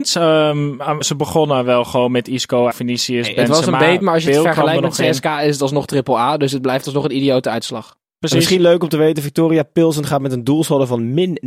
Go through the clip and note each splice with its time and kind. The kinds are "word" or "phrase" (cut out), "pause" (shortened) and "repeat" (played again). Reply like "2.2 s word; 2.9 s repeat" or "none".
1.0 s word; 2.7 s word; 4.0 s word